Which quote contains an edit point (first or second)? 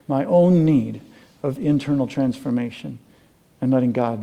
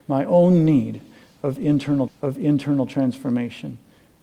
second